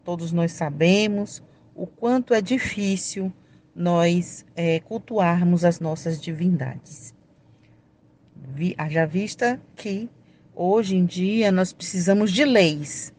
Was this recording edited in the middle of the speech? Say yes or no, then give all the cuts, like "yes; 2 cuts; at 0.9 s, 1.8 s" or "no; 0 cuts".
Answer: no; 0 cuts